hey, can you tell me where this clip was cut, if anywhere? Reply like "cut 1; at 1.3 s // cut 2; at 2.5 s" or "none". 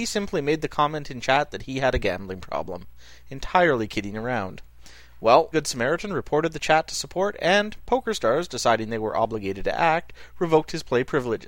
cut 1; at 5.5 s